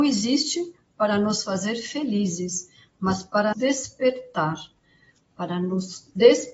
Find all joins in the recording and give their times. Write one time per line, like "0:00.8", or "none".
0:03.5